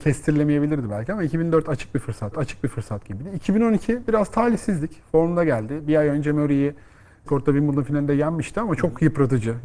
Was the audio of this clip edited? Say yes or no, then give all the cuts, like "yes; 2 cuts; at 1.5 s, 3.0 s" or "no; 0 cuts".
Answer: yes; 2 cuts; at 2.3 s, 7.3 s